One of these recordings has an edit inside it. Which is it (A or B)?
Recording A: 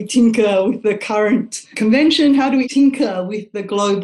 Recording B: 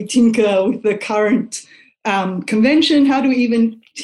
A